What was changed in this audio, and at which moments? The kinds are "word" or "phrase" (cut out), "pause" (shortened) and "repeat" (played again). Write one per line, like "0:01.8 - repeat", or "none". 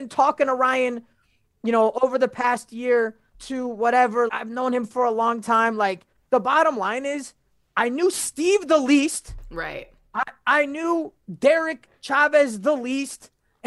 0:03.3 - word
0:04.3 - word

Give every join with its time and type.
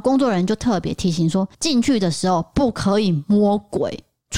0:01.5 - pause

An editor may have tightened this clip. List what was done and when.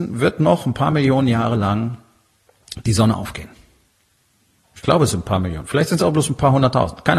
none

